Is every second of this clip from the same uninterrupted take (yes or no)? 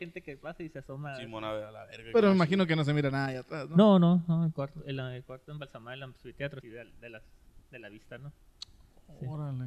no